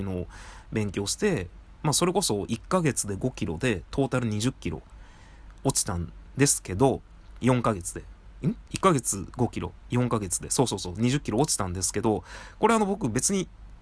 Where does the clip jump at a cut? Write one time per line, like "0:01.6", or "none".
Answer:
0:08.7